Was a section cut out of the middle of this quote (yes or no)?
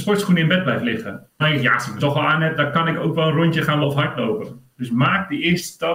yes